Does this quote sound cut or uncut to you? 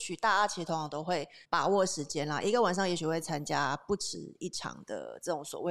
cut